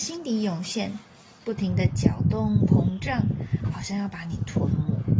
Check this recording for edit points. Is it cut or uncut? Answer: uncut